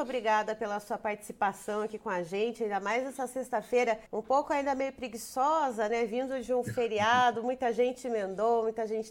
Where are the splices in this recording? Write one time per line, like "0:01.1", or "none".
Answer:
0:04.1

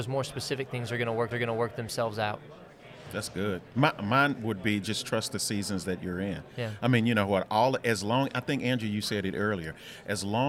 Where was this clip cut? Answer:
0:01.3

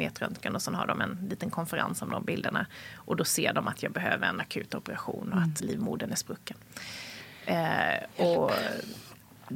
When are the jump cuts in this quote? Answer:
0:05.6

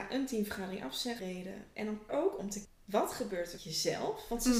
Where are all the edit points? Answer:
0:01.2
0:02.1
0:02.6
0:03.6

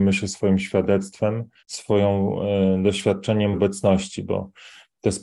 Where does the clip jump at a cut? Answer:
0:01.6
0:03.5

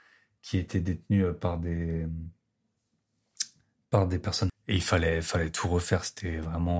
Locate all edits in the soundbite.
0:04.5

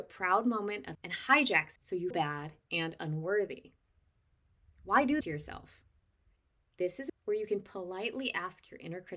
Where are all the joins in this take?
0:00.9
0:01.8
0:02.1
0:05.2
0:07.1

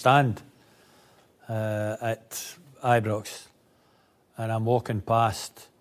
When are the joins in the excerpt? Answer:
none

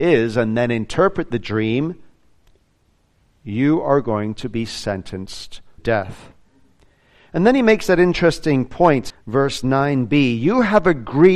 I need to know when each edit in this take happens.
0:05.8
0:09.1

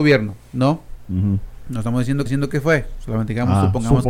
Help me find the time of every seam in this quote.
0:02.3

